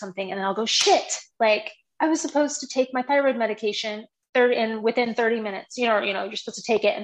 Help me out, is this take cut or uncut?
uncut